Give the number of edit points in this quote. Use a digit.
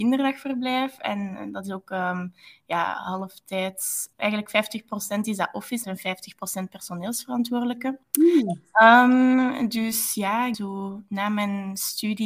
4